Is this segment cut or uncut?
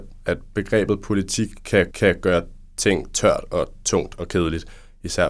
cut